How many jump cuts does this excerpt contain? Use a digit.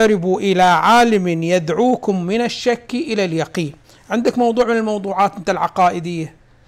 1